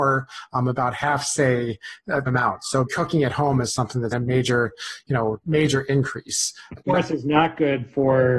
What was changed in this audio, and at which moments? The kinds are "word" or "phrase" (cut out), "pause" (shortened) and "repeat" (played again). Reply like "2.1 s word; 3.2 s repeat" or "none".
2.3 s word; 2.9 s word; 4.1 s word; 5.4 s word; 6.8 s word